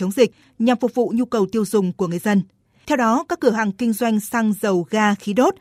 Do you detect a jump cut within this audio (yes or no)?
no